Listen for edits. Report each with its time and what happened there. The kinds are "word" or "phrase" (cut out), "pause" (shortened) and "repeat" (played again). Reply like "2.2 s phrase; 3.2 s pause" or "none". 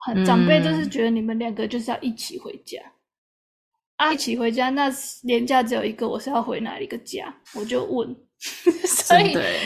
4.1 s phrase; 7.5 s pause